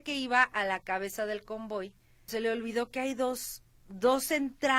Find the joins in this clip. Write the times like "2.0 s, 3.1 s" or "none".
2.3 s